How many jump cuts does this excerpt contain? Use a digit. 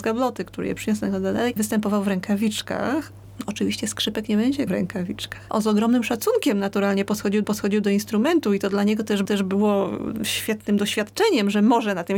4